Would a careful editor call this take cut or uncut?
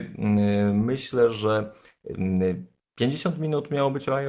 uncut